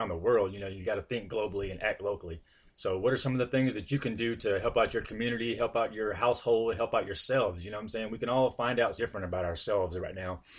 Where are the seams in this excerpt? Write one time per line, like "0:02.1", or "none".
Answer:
0:09.0